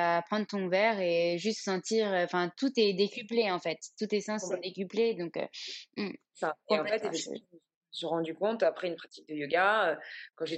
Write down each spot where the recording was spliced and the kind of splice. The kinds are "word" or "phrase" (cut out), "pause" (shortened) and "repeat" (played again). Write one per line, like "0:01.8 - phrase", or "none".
none